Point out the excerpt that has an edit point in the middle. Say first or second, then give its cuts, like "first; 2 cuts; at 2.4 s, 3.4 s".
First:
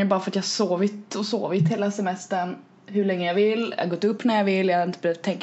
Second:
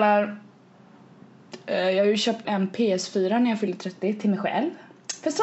second; 1 cut; at 2.4 s